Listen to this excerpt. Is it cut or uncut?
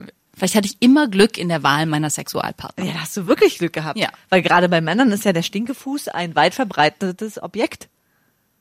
uncut